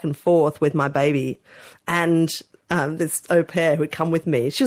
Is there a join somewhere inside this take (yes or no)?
yes